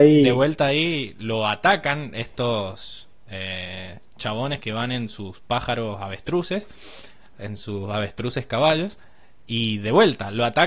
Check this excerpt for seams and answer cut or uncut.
uncut